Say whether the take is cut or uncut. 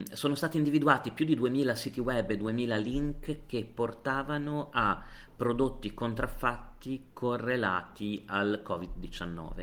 uncut